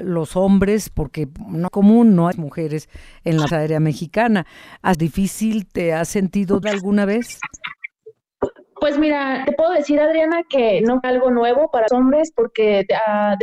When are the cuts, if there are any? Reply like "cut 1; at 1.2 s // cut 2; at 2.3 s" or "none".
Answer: cut 1; at 1.7 s // cut 2; at 2.3 s // cut 3; at 3.5 s // cut 4; at 4.9 s // cut 5; at 6.6 s // cut 6; at 9.4 s // cut 7; at 11.0 s // cut 8; at 11.9 s